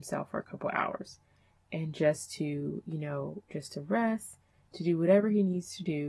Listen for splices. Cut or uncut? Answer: uncut